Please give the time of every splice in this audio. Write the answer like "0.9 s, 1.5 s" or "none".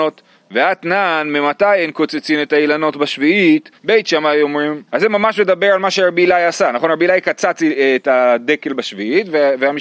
3.8 s, 4.9 s